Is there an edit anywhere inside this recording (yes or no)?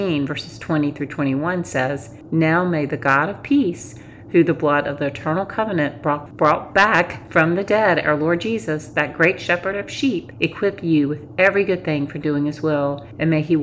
no